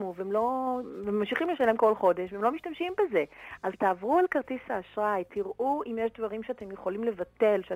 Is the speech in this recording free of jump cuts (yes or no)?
yes